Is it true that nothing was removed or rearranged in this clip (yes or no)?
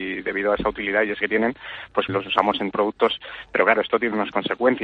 no